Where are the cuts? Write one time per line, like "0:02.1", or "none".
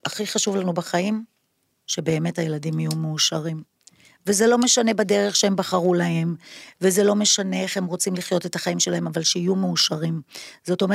none